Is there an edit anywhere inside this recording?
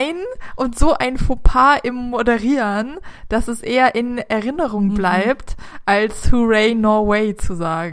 no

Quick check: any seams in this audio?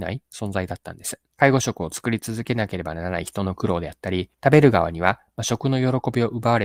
yes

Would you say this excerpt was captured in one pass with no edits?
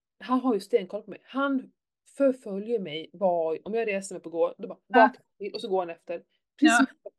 yes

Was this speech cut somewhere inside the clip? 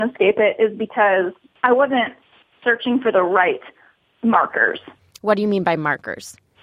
no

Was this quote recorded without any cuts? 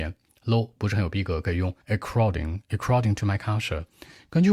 no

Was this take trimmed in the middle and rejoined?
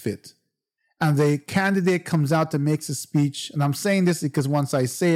no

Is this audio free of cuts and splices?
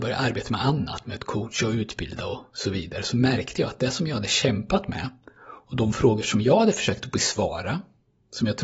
yes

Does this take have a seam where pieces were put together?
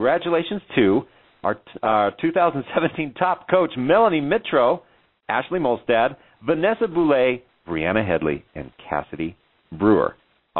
no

